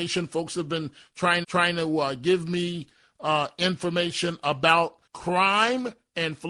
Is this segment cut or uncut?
cut